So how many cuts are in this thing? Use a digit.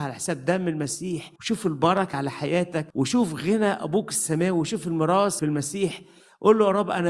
4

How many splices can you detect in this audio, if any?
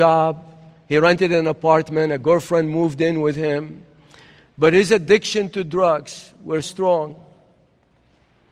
1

